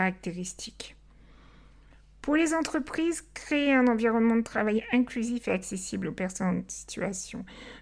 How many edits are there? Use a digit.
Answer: 0